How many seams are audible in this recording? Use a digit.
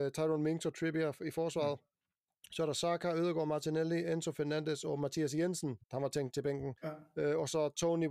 2